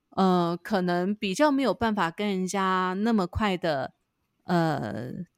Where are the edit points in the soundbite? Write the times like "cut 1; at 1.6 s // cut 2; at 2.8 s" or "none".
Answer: none